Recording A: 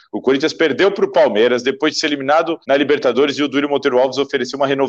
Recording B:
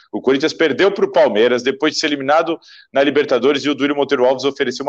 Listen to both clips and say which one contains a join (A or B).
A